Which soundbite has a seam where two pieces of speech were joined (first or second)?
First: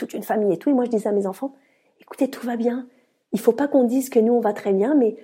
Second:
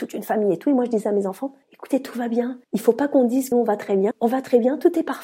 second